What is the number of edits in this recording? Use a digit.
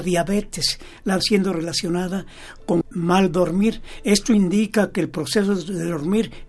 2